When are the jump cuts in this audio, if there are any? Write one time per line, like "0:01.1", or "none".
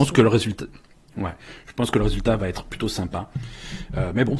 none

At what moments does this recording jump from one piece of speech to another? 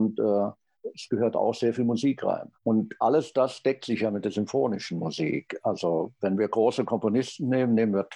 0:02.5

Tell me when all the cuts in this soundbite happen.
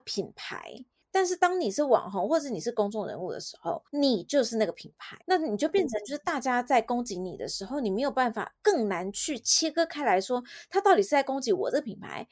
0:03.9
0:05.2

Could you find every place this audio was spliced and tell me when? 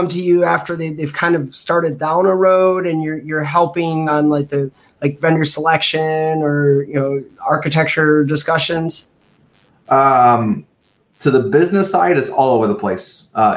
0:04.1

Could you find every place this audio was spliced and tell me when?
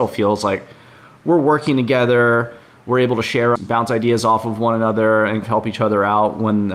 0:03.6
0:05.4

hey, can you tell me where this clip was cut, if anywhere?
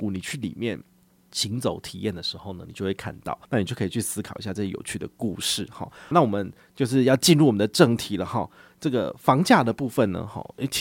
0:03.4
0:06.1

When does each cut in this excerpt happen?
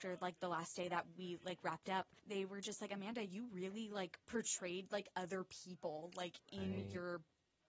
0:02.2
0:04.2

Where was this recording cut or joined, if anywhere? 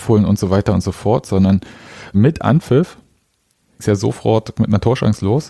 0:02.1
0:03.8

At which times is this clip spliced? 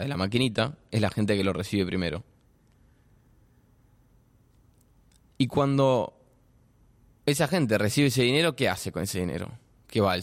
none

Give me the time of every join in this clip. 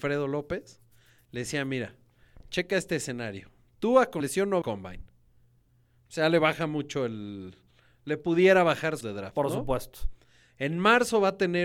0:04.2
0:04.6
0:09.0

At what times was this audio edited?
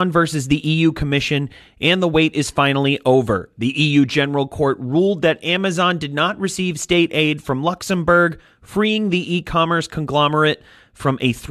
none

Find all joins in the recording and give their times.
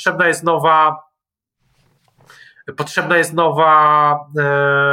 none

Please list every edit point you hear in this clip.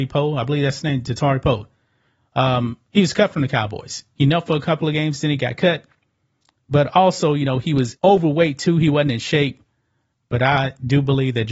0:08.0

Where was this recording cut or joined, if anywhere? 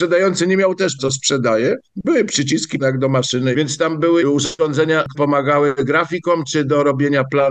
0:01.0
0:02.8
0:03.5
0:04.2
0:05.1

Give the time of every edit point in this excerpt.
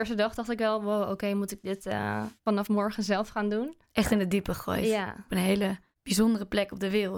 0:02.4
0:03.8

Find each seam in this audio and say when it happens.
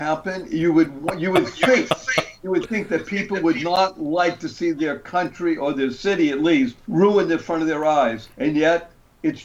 0:06.8
0:08.3

